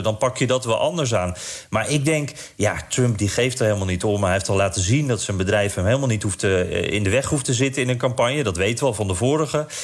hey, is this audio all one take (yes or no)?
yes